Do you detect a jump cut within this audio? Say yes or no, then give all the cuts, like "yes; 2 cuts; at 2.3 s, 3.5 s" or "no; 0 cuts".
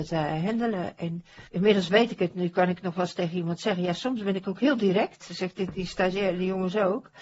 yes; 1 cut; at 1.5 s